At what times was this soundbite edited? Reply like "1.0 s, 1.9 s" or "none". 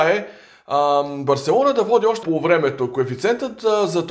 2.2 s